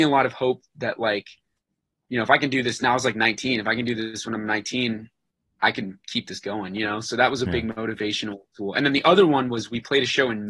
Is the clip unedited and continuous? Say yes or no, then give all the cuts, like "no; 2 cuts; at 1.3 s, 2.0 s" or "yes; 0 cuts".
yes; 0 cuts